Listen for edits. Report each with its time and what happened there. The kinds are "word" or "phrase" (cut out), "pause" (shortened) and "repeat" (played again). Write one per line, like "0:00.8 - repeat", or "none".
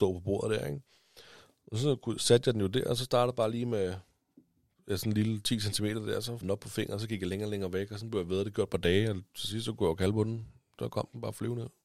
0:06.4 - word